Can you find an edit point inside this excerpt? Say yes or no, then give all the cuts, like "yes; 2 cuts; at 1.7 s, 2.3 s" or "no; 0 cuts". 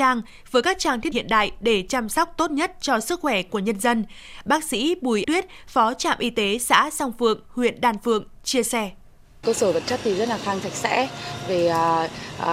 yes; 4 cuts; at 1.1 s, 5.2 s, 9.4 s, 10.6 s